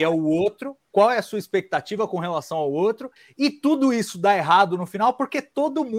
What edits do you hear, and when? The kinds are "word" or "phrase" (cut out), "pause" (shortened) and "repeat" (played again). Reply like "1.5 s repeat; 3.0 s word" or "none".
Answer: none